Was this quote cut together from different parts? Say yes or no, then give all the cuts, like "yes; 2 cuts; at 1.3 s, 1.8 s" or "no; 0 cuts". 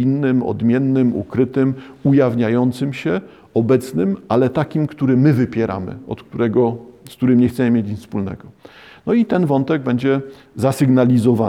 no; 0 cuts